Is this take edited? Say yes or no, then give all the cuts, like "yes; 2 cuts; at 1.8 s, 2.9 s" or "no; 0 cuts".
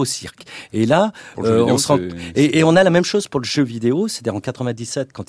no; 0 cuts